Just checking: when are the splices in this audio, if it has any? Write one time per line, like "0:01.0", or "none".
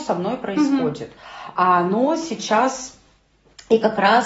none